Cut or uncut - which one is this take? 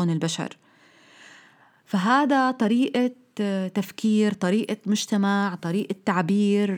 uncut